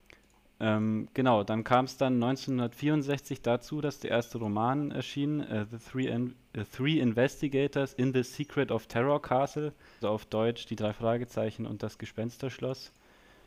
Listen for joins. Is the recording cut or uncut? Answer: cut